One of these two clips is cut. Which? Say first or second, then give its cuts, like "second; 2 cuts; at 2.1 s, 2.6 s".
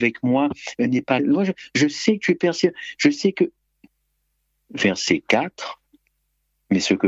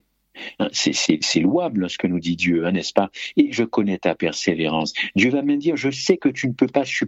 first; 1 cut; at 1.2 s